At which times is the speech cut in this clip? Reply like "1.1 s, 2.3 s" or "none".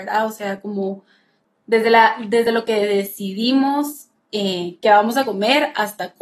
none